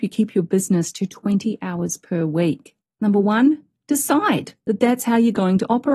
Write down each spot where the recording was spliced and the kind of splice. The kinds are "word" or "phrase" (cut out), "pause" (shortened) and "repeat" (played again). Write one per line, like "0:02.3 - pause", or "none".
0:02.8 - pause
0:04.6 - pause

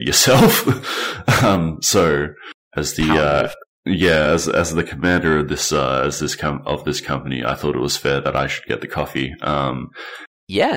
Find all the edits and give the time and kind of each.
none

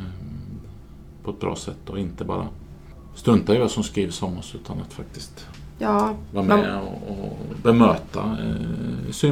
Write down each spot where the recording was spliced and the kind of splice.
none

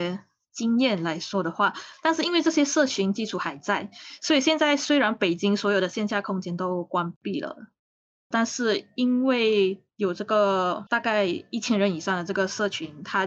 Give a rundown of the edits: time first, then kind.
none

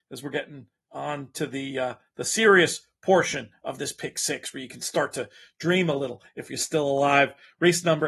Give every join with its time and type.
none

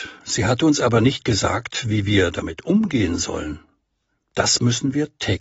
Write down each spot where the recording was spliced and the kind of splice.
none

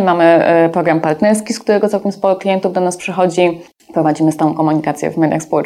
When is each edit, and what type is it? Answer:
none

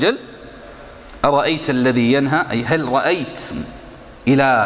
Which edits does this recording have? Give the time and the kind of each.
none

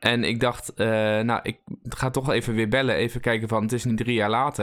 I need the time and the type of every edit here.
none

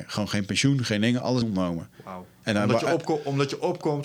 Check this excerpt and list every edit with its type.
0:01.4 - phrase
0:02.3 - pause

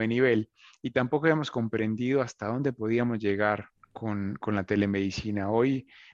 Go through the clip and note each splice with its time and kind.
0:03.7 - pause

